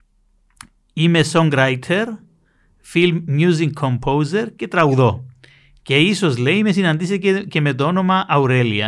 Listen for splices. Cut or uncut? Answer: uncut